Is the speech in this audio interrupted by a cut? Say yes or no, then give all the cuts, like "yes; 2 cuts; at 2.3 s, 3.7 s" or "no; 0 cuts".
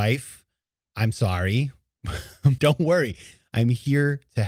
yes; 1 cut; at 2.6 s